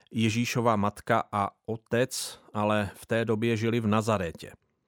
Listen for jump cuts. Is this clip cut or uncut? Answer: uncut